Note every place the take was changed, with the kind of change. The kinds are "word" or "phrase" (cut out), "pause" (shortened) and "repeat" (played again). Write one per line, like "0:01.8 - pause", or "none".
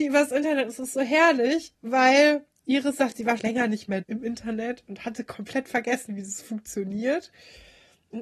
0:01.7 - pause
0:03.4 - word
0:04.0 - word